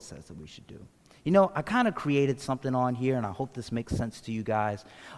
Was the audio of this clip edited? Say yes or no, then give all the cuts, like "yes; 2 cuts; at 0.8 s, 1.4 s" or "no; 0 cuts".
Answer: no; 0 cuts